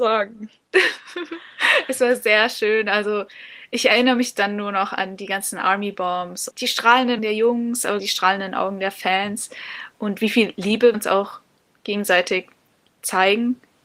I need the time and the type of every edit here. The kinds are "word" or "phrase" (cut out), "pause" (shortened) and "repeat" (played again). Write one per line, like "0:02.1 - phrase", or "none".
0:06.5 - word
0:07.2 - word
0:08.0 - word
0:10.9 - word